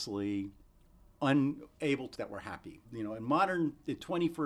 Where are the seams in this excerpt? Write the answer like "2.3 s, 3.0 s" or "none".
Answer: 2.2 s, 2.8 s

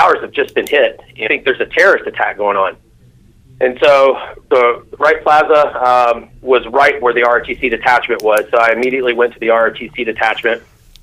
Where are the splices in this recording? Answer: 1.3 s, 5.0 s, 7.0 s

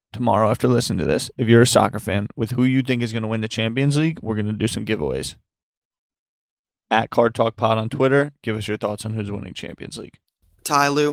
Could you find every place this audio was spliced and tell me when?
none

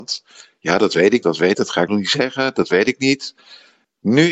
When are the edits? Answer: 1.2 s, 1.5 s, 1.9 s

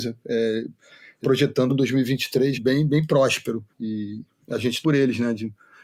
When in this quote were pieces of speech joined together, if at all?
1.2 s, 1.7 s, 2.5 s, 3.7 s, 4.8 s

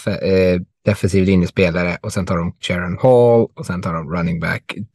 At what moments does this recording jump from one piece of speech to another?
2.6 s

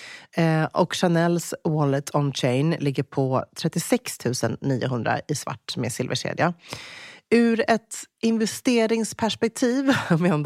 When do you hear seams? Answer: none

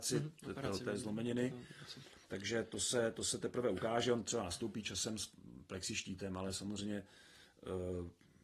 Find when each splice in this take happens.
2.2 s

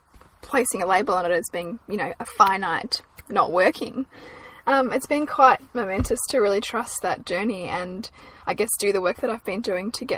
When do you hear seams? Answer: none

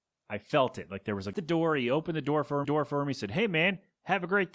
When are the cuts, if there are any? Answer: 1.3 s, 2.6 s

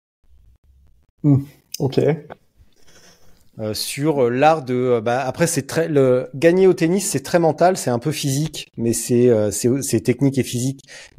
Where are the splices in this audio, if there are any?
none

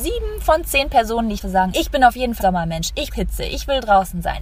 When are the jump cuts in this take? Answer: 1.4 s, 1.7 s, 2.4 s, 3.1 s

